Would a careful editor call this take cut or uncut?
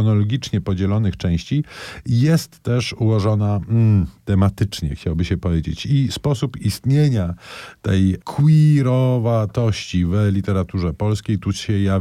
uncut